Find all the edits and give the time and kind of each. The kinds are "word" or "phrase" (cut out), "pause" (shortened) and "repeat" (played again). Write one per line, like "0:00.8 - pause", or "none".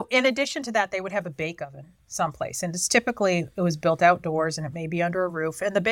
none